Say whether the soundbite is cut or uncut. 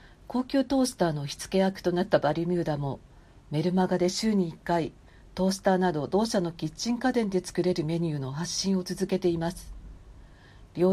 uncut